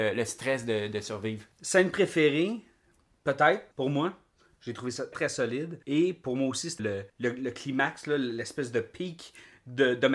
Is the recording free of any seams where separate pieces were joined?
no; 6 cuts; at 1.5 s, 3.7 s, 5.1 s, 5.8 s, 6.8 s, 7.1 s

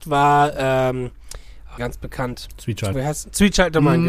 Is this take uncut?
no; 2 cuts; at 1.8 s, 2.9 s

